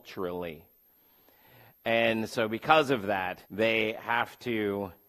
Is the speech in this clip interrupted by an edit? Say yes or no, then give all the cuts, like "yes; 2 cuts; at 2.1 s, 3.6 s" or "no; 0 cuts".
yes; 1 cut; at 3.5 s